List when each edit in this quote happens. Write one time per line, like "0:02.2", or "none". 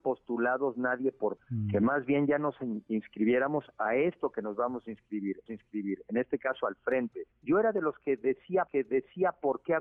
0:01.4
0:05.5
0:07.3
0:08.7